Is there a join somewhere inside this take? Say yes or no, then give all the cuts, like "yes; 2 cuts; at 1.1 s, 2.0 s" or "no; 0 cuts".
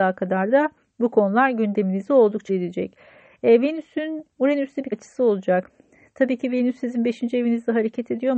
yes; 2 cuts; at 2.5 s, 4.9 s